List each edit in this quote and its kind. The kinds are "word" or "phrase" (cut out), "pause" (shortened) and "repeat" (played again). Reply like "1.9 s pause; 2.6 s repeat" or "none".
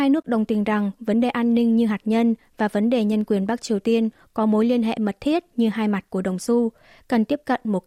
none